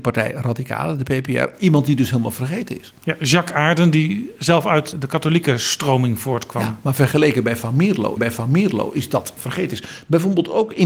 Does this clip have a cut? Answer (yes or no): yes